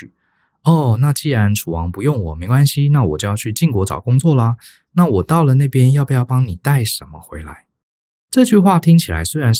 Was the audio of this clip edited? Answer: no; 0 cuts

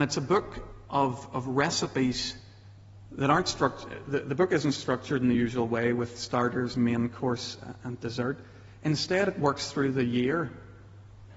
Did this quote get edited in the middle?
no; 0 cuts

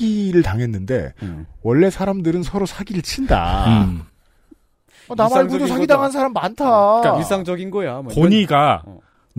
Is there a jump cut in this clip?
no; 0 cuts

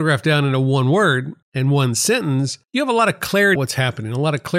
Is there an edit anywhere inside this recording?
yes; 3 cuts; at 1.4 s, 2.6 s, 3.6 s

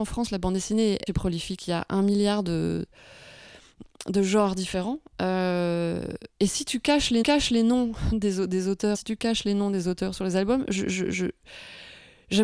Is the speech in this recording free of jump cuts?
no; 4 cuts; at 1.1 s, 6.3 s, 7.2 s, 8.9 s

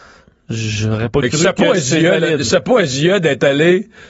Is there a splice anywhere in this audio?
no; 0 cuts

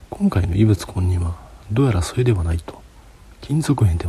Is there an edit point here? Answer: no; 0 cuts

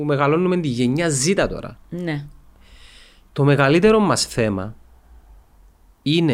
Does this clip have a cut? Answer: no; 0 cuts

